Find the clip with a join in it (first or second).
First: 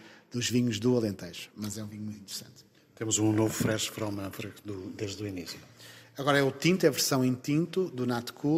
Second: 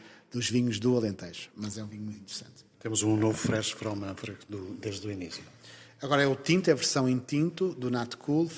second